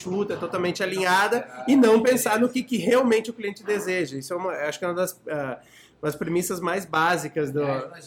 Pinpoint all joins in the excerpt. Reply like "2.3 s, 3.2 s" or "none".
none